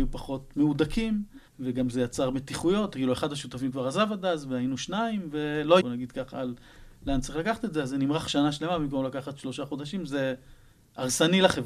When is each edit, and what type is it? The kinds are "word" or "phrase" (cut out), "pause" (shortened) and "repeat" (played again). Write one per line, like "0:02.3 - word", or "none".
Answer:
0:01.5 - pause
0:05.8 - word

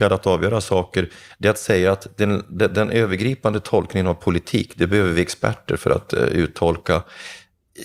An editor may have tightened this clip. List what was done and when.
none

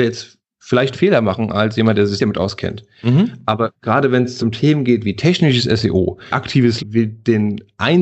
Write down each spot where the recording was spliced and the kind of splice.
0:00.9 - word
0:02.2 - word
0:04.4 - word
0:05.0 - word
0:06.3 - word
0:06.8 - word

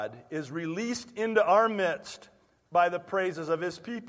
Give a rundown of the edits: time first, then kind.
none

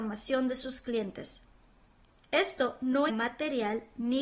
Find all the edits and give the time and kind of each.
0:03.1 - word

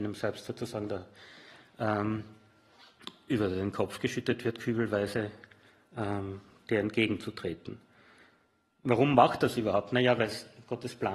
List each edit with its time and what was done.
none

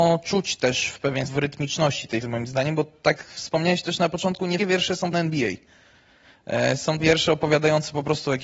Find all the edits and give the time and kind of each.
0:01.3 - word
0:02.2 - word
0:03.2 - word
0:04.6 - word
0:05.1 - word
0:07.0 - word

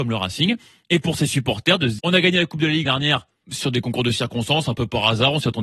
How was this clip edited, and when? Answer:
0:02.0 - word
0:02.8 - word
0:03.4 - word

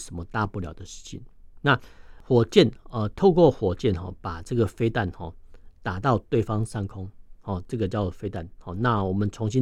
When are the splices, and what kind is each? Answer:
none

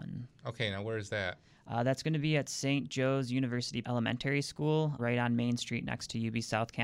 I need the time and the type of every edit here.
0:03.8 - word
0:05.0 - word

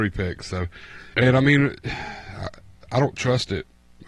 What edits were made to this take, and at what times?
0:01.1 - word

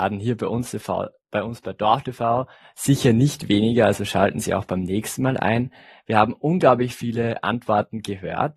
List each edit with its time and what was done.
none

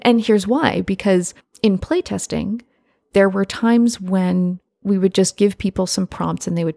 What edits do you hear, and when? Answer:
0:01.4 - pause
0:04.7 - pause

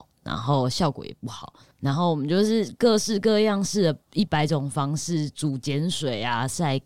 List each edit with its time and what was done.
none

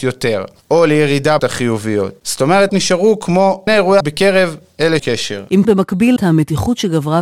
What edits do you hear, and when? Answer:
0:01.4 - word
0:02.7 - word
0:03.7 - word
0:04.0 - word
0:05.0 - word
0:05.6 - word
0:06.2 - word

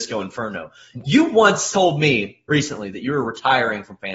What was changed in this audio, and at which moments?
none

